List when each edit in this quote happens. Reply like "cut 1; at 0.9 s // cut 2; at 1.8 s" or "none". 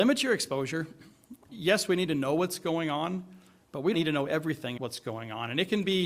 cut 1; at 1.5 s // cut 2; at 3.9 s // cut 3; at 4.8 s